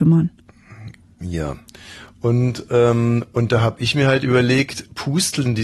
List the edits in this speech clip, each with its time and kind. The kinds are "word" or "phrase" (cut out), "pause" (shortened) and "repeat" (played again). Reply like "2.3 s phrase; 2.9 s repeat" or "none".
none